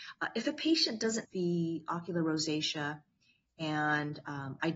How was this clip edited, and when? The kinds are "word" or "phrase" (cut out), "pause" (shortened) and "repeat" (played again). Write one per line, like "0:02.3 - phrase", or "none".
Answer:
0:01.2 - word